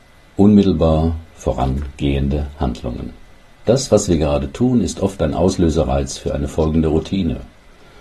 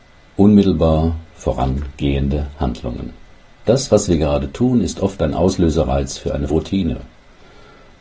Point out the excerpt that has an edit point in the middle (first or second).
second